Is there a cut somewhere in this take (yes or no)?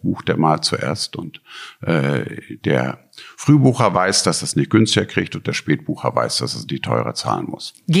no